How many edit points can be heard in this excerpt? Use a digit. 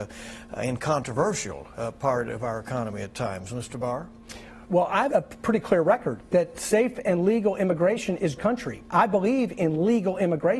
3